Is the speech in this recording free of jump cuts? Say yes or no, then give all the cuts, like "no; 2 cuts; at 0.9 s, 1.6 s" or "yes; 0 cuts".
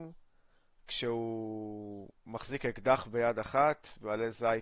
no; 1 cut; at 2.2 s